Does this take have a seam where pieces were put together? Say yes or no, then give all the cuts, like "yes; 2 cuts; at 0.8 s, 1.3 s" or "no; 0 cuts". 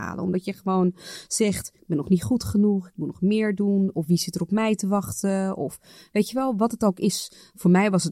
no; 0 cuts